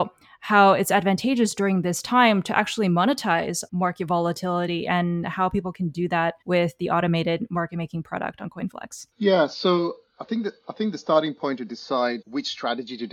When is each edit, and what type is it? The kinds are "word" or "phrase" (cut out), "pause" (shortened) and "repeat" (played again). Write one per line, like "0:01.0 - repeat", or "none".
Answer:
0:03.7 - word
0:06.4 - pause
0:09.1 - pause
0:12.2 - word